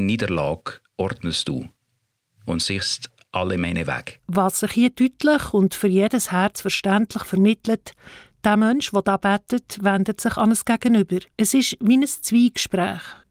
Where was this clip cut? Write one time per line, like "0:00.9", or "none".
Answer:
0:04.2
0:11.3